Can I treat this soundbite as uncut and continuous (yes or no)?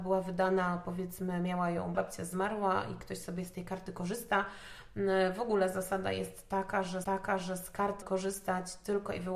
no